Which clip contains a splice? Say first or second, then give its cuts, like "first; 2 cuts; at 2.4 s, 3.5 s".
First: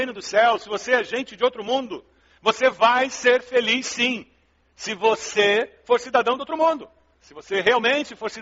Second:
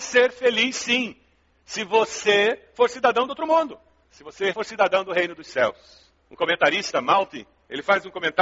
second; 1 cut; at 4.5 s